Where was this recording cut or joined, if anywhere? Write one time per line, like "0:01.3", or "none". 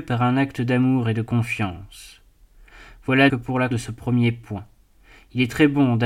0:03.3
0:03.7